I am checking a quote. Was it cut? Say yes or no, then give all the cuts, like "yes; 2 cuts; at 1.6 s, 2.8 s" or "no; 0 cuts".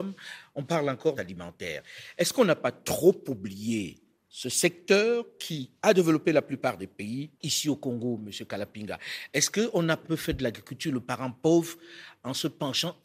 yes; 4 cuts; at 1.2 s, 5.8 s, 7.4 s, 10.0 s